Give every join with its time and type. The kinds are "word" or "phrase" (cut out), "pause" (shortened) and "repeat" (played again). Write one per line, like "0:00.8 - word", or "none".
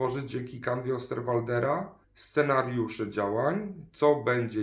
0:02.0 - pause